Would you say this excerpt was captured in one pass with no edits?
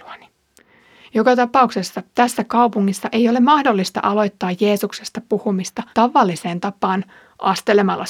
no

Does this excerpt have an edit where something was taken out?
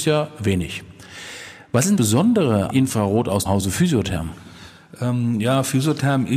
yes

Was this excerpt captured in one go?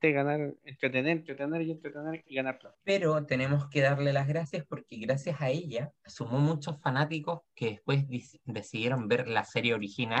no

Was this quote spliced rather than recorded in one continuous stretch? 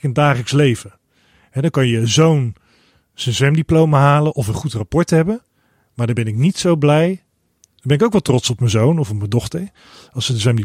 no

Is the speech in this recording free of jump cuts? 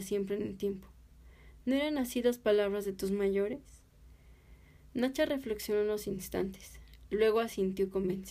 yes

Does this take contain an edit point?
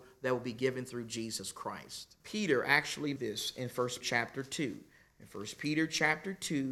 yes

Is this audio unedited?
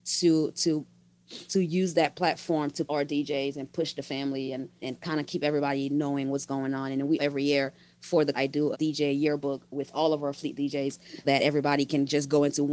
no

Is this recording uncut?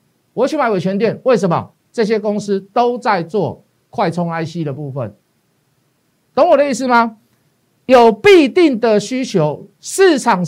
no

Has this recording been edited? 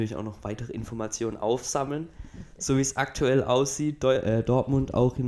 no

